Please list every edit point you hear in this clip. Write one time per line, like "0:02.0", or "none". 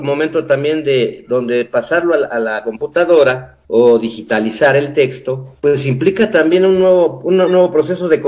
0:03.6
0:05.6